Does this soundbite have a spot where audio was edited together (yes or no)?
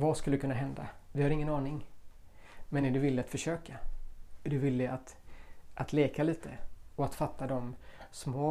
no